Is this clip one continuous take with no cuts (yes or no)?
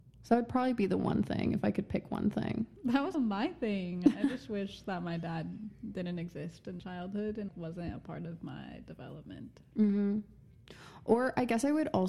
no